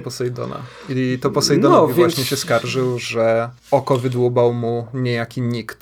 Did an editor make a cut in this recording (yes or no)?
yes